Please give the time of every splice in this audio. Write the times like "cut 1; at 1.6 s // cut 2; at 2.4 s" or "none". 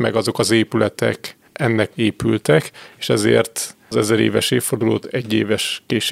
cut 1; at 1.5 s // cut 2; at 1.9 s // cut 3; at 3.9 s